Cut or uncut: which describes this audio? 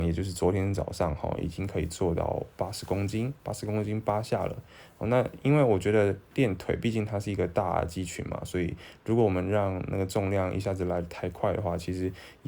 cut